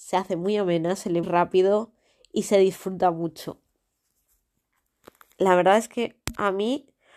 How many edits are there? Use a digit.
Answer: 1